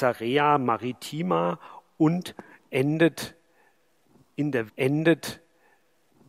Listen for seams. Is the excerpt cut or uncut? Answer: cut